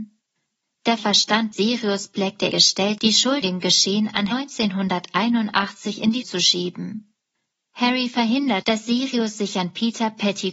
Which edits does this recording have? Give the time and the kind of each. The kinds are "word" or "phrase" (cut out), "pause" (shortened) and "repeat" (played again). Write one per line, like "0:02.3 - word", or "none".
0:01.0 - word
0:01.5 - word
0:02.5 - word
0:03.0 - word
0:03.4 - word
0:04.3 - word
0:06.2 - word
0:08.6 - word